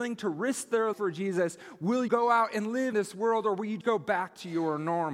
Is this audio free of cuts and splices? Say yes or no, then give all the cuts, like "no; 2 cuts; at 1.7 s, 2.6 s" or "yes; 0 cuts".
no; 4 cuts; at 0.9 s, 2.1 s, 2.9 s, 3.8 s